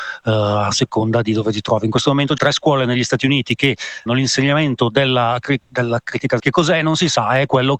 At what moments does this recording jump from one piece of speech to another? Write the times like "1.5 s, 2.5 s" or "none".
2.4 s, 4.1 s, 5.6 s, 6.4 s